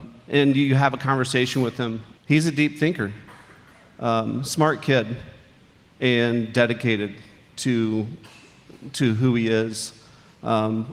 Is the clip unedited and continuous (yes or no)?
no